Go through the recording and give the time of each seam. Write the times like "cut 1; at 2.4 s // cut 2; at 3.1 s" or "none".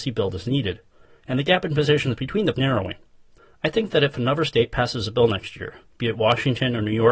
cut 1; at 2.5 s

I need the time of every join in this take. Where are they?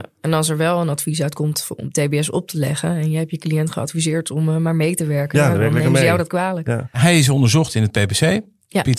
none

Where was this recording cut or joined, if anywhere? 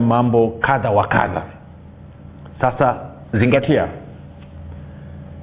none

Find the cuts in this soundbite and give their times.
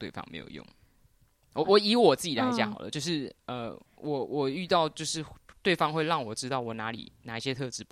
cut 1; at 3.9 s

